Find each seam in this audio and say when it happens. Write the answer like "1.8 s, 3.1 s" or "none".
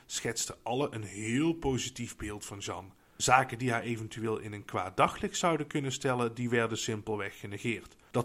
none

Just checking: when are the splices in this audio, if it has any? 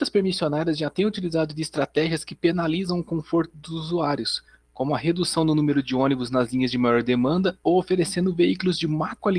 none

